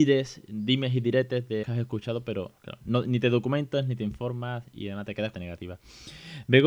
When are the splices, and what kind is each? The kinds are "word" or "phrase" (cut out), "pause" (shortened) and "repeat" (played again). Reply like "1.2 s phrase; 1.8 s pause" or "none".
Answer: 1.6 s word; 5.3 s phrase